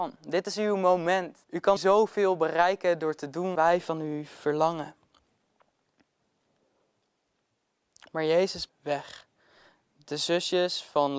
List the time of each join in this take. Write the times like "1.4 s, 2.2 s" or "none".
1.4 s, 1.8 s, 3.5 s, 8.7 s